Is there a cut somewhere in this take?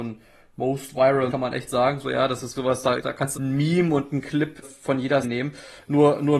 yes; 6 cuts; at 1.3 s, 2.5 s, 3.0 s, 3.3 s, 4.6 s, 5.2 s

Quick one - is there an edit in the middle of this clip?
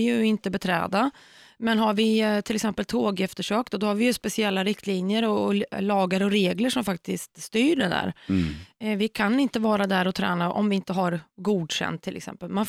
no; 0 cuts

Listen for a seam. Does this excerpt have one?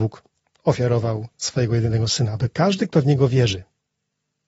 no; 0 cuts

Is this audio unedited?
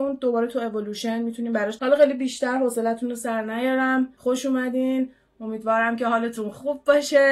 no; 1 cut; at 1.8 s

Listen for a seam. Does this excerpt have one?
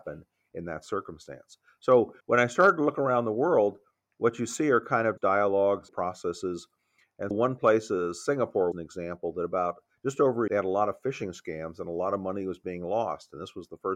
yes; 6 cuts; at 2.2 s, 5.2 s, 5.9 s, 7.3 s, 8.7 s, 10.5 s

